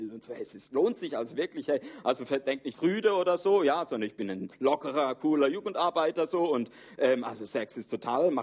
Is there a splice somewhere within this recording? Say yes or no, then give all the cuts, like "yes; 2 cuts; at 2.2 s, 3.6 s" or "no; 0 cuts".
no; 0 cuts